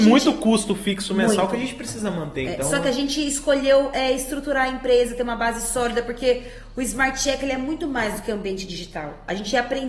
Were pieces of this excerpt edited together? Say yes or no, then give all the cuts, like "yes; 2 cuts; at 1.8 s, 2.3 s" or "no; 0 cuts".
no; 0 cuts